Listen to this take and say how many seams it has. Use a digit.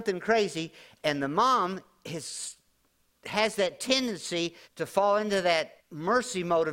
2